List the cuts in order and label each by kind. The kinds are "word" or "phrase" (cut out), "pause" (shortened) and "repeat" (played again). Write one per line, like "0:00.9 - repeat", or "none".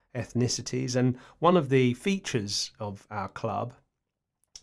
none

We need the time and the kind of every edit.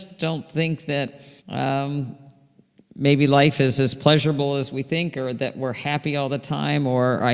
0:01.4 - pause

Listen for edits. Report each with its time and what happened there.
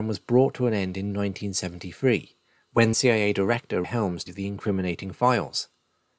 0:02.9 - word
0:03.8 - word
0:04.3 - word

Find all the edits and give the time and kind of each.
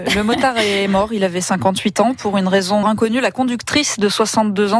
0:02.8 - word

